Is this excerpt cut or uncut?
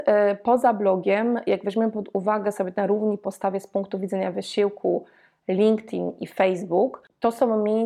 uncut